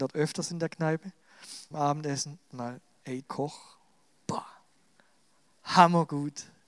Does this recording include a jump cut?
yes; 3 cuts; at 1.7 s, 2.5 s, 3.2 s

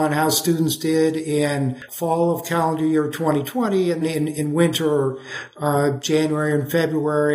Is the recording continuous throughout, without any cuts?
no; 2 cuts; at 1.9 s, 4.0 s

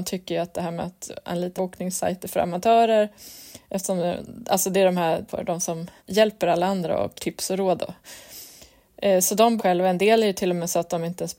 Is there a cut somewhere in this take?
yes; 6 cuts; at 1.6 s, 3.6 s, 5.3 s, 6.0 s, 7.2 s, 9.6 s

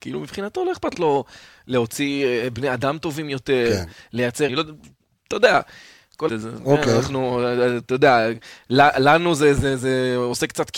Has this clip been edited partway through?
yes; 3 cuts; at 0.9 s, 4.5 s, 6.3 s

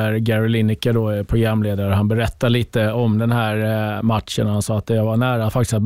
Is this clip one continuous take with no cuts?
yes; 0 cuts

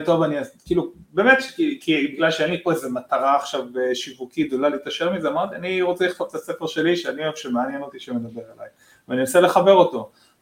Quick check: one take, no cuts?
yes; 0 cuts

